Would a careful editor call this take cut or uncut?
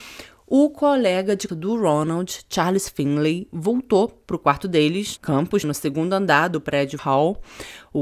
cut